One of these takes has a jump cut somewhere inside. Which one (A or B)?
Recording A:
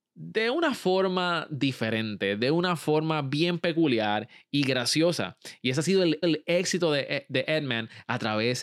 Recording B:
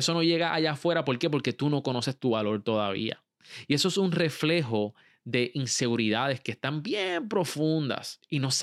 A